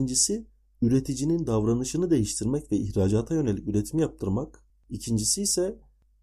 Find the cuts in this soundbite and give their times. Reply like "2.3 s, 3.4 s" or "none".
none